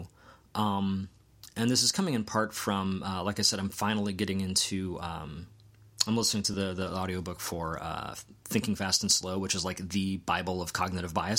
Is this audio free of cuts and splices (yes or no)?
yes